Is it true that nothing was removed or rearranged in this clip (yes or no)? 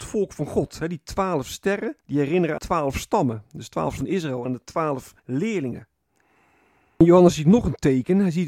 no